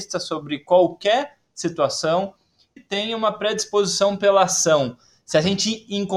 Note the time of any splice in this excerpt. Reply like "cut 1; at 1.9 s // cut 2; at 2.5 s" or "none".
cut 1; at 2.8 s

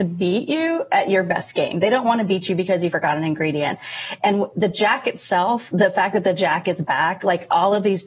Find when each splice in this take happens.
none

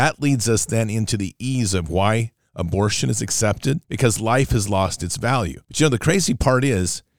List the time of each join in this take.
cut 1; at 3.8 s // cut 2; at 5.6 s

